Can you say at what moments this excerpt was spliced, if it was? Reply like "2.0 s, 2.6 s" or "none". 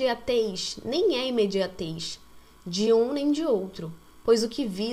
none